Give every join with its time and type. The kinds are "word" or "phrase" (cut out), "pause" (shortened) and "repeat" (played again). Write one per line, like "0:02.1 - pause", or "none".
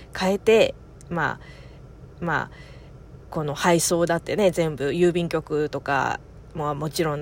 0:02.2 - repeat

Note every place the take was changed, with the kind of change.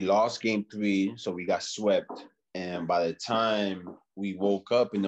none

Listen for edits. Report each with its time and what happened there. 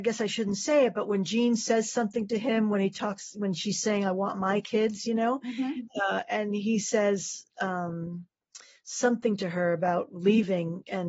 none

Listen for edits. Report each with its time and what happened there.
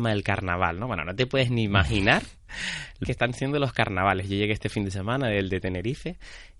0:03.0 - word

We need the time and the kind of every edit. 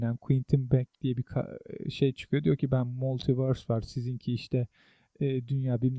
0:00.9 - pause

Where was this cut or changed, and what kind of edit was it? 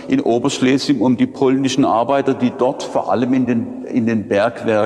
none

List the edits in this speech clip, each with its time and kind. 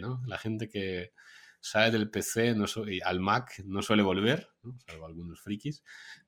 none

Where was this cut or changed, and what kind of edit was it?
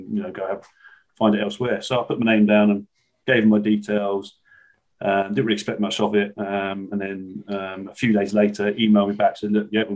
none

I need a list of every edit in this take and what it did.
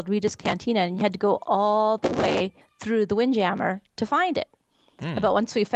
0:02.6 - pause

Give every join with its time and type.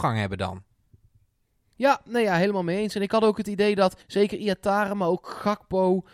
0:04.0 - pause

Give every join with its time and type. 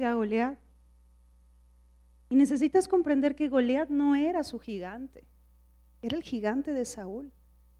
none

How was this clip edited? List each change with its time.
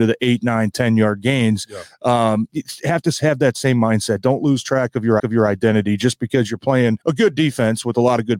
0:02.5 - word
0:05.2 - repeat
0:07.0 - pause

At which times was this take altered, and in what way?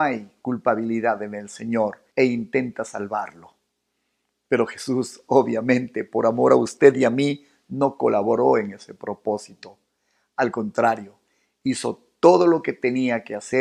0:02.1 - pause

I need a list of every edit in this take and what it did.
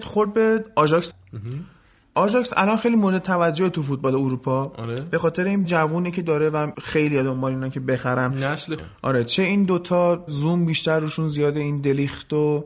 0:01.1 - word
0:05.6 - word
0:08.8 - word
0:10.3 - word

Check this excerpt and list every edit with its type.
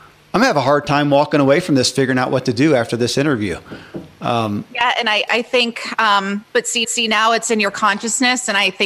0:05.3 - word
0:06.5 - pause
0:06.8 - repeat

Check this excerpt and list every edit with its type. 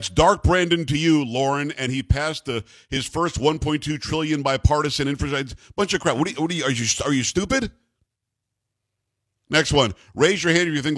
none

